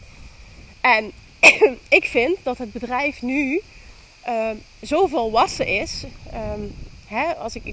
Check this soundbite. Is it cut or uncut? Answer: uncut